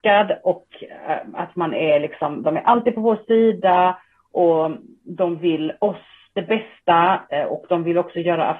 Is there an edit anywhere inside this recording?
no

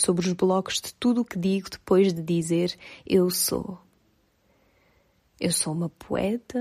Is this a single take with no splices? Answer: yes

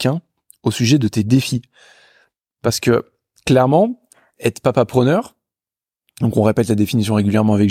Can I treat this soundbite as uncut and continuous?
yes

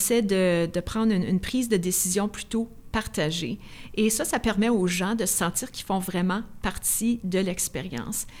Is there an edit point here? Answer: no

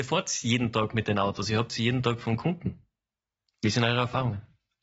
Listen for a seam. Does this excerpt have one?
no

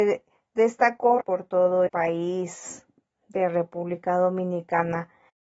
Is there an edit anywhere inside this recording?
yes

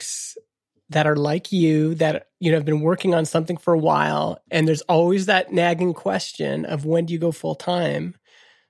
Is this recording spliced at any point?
no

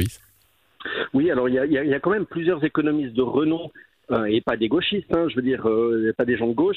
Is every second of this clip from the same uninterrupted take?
yes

